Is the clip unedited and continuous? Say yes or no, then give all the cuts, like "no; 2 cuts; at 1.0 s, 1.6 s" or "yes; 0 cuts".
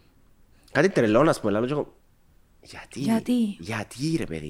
yes; 0 cuts